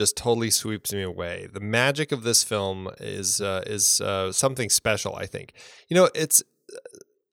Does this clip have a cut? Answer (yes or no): no